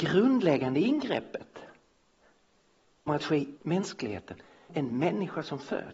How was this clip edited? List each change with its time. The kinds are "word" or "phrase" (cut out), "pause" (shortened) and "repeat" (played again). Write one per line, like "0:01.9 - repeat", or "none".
0:03.1 - word
0:03.6 - word
0:04.7 - word